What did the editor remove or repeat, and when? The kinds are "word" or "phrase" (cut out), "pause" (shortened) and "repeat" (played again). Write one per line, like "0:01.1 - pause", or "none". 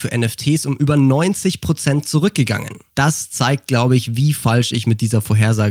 none